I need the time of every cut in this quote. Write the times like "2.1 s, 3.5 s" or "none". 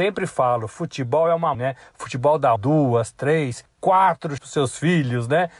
1.5 s, 2.6 s, 4.4 s